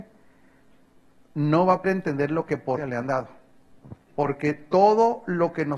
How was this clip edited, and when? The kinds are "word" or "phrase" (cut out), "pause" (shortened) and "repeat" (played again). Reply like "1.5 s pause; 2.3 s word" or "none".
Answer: 1.8 s word; 2.8 s word; 4.0 s pause